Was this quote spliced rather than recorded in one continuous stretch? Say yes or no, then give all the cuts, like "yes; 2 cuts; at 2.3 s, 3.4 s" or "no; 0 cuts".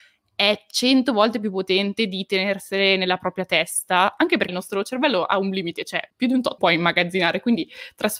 yes; 3 cuts; at 4.5 s, 6.1 s, 6.6 s